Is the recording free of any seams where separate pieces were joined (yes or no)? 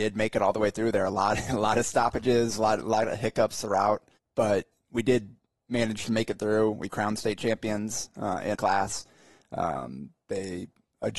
no